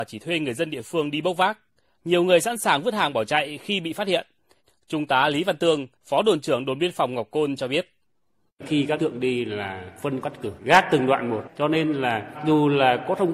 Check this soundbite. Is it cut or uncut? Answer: cut